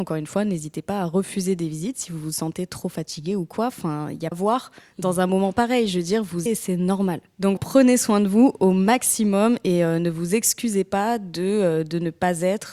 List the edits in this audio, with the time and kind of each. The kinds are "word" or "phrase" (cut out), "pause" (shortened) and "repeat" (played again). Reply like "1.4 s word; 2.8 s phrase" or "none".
4.3 s phrase; 6.5 s phrase; 7.6 s word